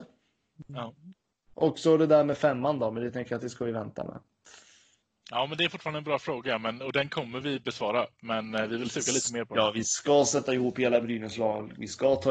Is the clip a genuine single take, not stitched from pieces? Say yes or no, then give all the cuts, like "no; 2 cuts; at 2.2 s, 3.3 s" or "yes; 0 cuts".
yes; 0 cuts